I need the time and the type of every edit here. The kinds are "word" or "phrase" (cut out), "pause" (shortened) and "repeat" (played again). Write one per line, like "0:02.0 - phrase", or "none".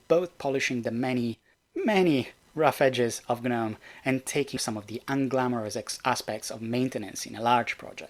0:01.5 - word
0:04.6 - word

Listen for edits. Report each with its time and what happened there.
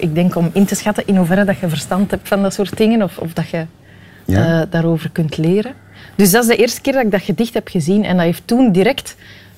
none

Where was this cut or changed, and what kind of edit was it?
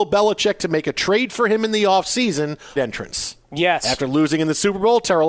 0:02.8 - phrase
0:03.4 - pause

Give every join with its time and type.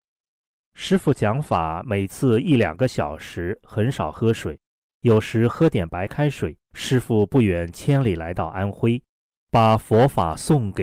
0:06.6 - pause

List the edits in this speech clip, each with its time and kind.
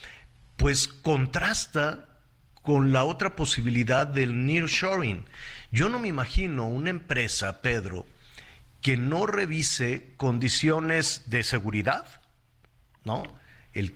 none

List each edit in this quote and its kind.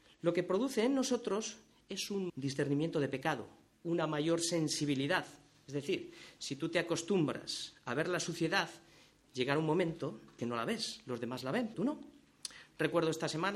0:02.3 - word
0:10.4 - word
0:11.7 - word

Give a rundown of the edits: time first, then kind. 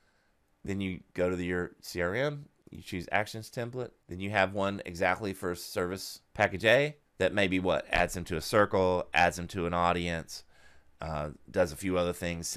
0:04.0 - pause
0:06.3 - pause
0:07.1 - pause

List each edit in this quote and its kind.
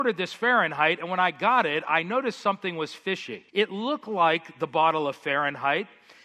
0:03.5 - pause

